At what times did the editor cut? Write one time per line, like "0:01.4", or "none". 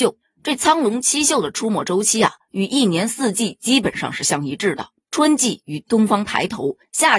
none